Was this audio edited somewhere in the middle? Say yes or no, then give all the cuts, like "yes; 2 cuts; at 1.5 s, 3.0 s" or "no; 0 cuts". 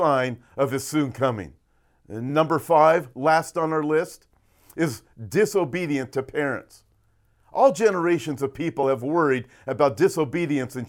no; 0 cuts